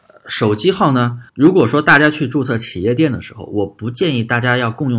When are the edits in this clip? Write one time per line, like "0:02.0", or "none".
0:01.3